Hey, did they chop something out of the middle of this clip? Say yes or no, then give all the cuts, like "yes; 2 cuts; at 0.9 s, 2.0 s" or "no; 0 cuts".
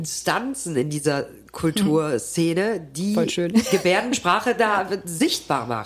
no; 0 cuts